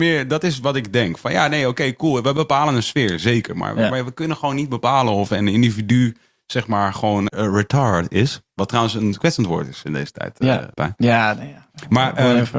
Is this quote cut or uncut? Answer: cut